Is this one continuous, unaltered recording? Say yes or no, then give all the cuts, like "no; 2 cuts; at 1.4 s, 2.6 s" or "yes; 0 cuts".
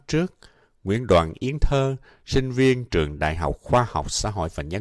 yes; 0 cuts